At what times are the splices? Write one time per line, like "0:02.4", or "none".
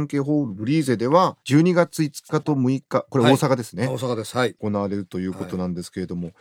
0:01.4